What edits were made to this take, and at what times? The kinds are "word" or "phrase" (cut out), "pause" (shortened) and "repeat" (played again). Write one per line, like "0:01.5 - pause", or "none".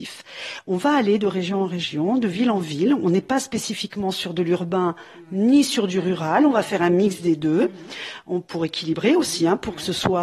none